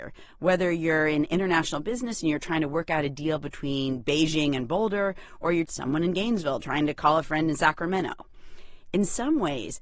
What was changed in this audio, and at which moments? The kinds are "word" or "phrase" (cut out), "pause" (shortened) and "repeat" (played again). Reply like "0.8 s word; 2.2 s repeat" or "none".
5.7 s word